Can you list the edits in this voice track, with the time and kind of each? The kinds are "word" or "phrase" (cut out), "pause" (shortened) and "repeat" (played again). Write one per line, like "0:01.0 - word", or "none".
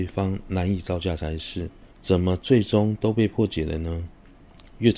0:01.9 - pause